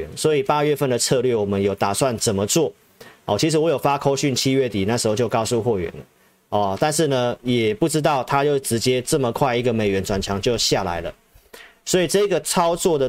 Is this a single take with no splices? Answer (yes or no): yes